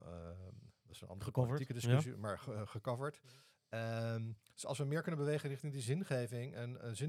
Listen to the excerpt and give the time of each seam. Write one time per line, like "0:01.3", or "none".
none